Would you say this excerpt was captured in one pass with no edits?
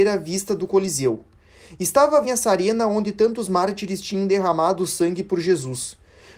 no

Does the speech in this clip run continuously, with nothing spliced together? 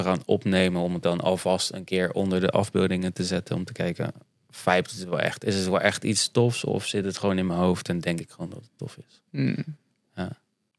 yes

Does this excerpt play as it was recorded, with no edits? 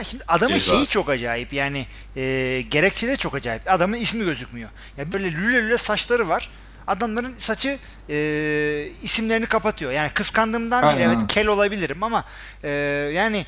no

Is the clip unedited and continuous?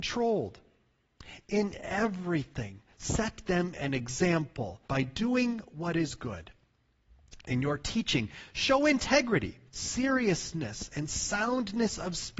no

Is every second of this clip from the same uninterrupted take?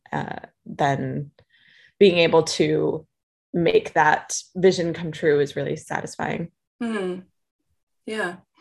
yes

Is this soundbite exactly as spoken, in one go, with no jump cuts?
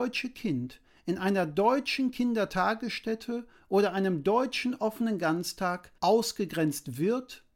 no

